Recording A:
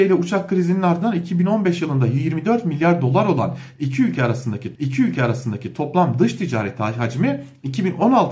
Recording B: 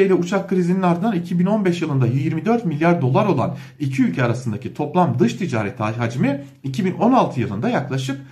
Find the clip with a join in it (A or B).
A